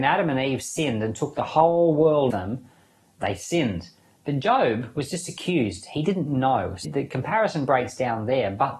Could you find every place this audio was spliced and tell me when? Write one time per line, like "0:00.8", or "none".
0:02.3
0:06.8